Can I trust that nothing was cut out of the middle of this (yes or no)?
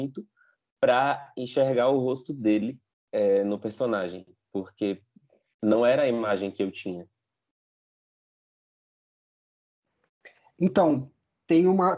no